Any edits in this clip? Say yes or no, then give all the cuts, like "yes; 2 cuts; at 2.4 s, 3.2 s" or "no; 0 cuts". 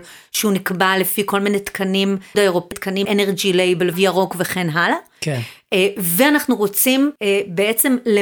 yes; 5 cuts; at 2.3 s, 2.7 s, 3.0 s, 3.9 s, 7.2 s